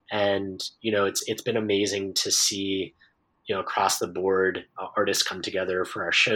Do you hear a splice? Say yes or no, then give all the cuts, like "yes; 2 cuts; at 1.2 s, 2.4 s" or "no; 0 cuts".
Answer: no; 0 cuts